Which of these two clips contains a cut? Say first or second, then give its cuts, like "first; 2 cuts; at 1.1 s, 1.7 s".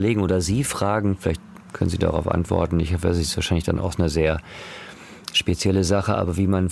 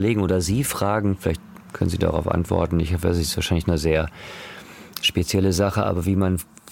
second; 1 cut; at 3.6 s